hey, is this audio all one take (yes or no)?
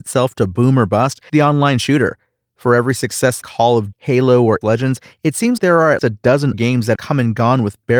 no